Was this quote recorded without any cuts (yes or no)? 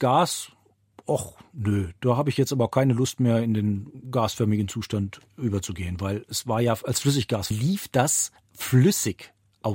no